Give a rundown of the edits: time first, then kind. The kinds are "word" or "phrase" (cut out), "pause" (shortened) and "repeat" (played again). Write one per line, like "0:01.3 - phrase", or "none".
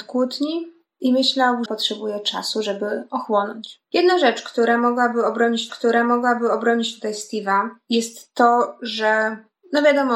0:01.7 - word
0:03.8 - pause
0:05.7 - repeat